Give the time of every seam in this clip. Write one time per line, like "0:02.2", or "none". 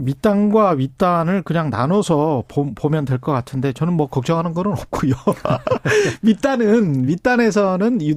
none